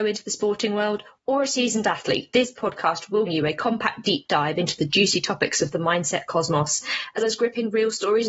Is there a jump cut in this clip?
yes; 2 cuts; at 3.3 s, 7.2 s

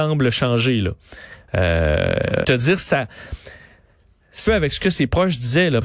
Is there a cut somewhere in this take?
yes; 2 cuts; at 2.4 s, 4.5 s

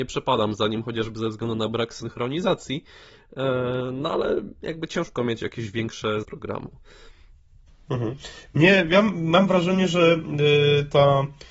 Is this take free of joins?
no; 1 cut; at 6.2 s

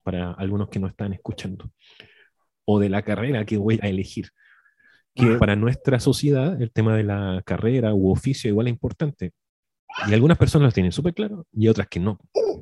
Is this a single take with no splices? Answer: no; 2 cuts; at 3.8 s, 5.4 s

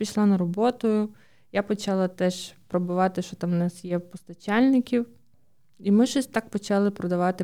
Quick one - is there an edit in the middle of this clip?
no; 0 cuts

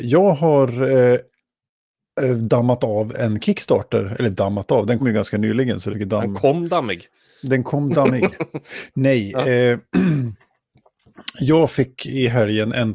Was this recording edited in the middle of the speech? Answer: yes; 2 cuts; at 5.0 s, 5.9 s

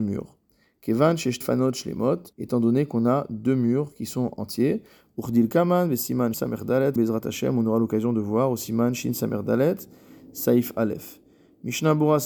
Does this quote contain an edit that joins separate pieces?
yes; 4 cuts; at 1.4 s, 2.3 s, 6.3 s, 7.0 s

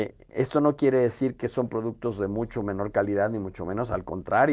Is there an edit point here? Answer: no; 0 cuts

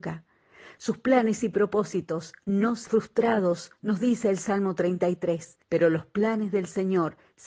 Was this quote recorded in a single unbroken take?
no; 2 cuts; at 2.9 s, 5.6 s

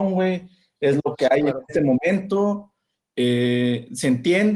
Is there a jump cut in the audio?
no; 0 cuts

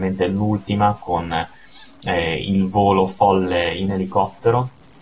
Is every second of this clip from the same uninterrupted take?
yes; 0 cuts

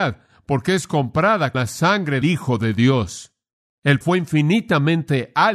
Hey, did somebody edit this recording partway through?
yes; 3 cuts; at 1.5 s, 2.2 s, 4.0 s

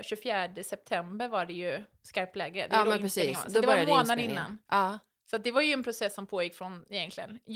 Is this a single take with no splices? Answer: yes; 0 cuts

